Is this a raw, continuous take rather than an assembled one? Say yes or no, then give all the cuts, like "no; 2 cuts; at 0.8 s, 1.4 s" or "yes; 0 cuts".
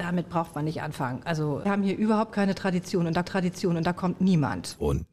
no; 2 cuts; at 1.6 s, 3.2 s